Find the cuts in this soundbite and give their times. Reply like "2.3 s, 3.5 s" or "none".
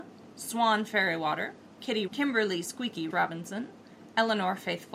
2.1 s, 3.1 s